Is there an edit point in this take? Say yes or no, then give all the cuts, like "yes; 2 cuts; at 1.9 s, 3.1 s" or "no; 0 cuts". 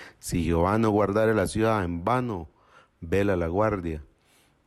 no; 0 cuts